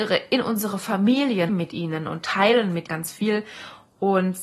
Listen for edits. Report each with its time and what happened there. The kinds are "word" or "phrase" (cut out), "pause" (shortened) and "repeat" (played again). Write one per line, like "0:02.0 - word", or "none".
0:01.5 - phrase
0:02.9 - word